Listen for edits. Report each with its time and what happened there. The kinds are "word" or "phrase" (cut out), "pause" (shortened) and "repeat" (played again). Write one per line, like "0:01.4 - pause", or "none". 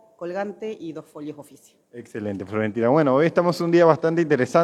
0:01.8 - pause